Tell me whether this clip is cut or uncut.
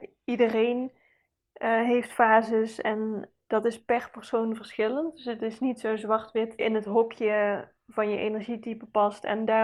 cut